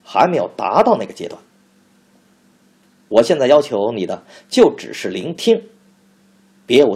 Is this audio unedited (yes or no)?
yes